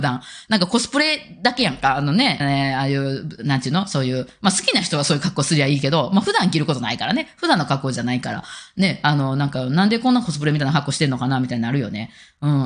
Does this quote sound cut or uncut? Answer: cut